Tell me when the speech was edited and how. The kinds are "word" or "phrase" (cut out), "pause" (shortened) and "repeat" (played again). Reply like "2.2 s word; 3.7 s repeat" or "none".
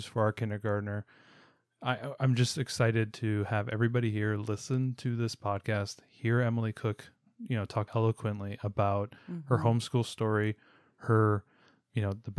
7.9 s word

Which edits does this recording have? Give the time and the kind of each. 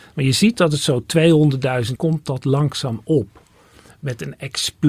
2.0 s word

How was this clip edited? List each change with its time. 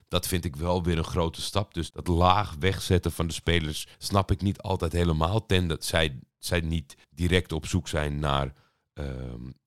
1.9 s word; 3.9 s pause; 7.0 s pause

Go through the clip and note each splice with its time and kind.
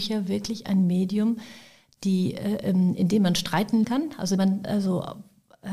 3.8 s word; 4.4 s word

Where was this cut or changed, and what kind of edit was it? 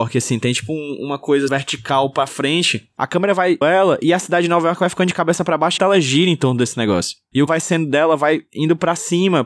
1.5 s word; 3.6 s word; 5.8 s word; 7.5 s word

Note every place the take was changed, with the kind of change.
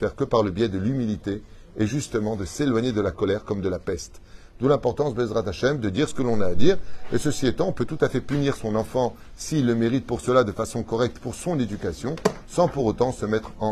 none

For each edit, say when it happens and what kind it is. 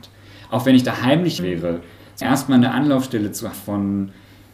1.4 s word; 2.2 s word; 3.5 s word

